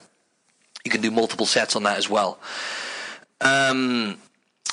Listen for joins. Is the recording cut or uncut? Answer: uncut